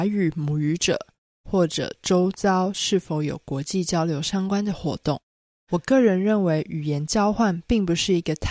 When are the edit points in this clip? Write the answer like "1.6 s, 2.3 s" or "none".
none